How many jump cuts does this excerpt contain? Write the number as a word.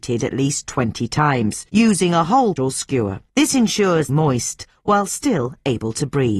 four